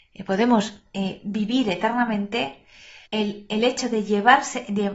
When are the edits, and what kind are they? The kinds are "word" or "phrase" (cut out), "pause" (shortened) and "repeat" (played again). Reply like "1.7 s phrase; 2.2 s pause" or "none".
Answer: 3.1 s pause